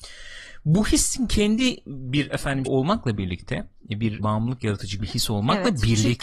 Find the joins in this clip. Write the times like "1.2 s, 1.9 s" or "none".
2.6 s, 4.2 s, 5.0 s

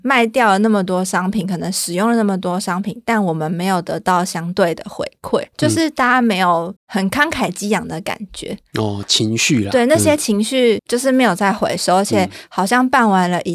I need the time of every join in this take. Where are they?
5.5 s, 6.8 s, 10.8 s

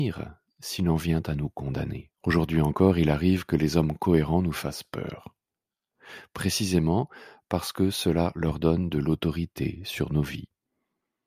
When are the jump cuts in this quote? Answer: 2.1 s

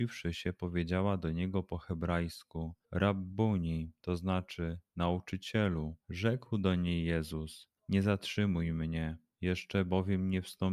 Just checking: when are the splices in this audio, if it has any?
2.8 s, 6.0 s, 7.8 s

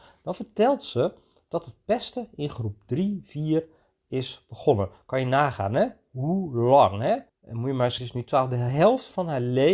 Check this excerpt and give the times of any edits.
7.3 s, 8.0 s

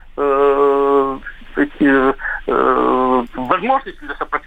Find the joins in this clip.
none

